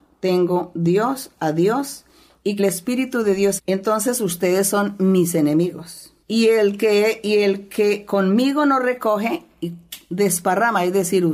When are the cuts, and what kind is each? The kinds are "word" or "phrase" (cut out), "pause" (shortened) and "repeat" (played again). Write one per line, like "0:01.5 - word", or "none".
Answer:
0:02.6 - phrase
0:03.6 - phrase
0:06.2 - pause